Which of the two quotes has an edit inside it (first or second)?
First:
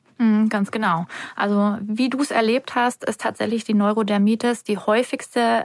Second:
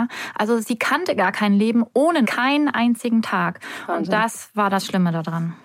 second